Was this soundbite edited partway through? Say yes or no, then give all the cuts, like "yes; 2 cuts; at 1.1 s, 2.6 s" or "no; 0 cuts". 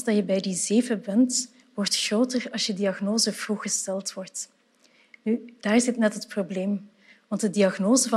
no; 0 cuts